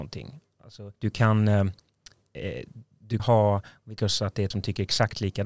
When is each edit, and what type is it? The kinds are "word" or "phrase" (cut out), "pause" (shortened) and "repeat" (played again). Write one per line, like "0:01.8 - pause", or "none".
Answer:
0:01.0 - pause
0:03.2 - word
0:04.0 - word
0:04.5 - phrase